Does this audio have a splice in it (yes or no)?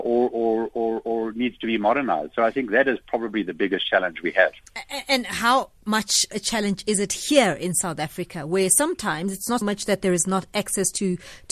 yes